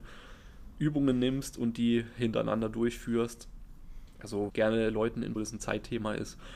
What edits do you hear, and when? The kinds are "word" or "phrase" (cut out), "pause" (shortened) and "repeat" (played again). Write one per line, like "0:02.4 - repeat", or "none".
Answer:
0:04.5 - phrase
0:05.4 - phrase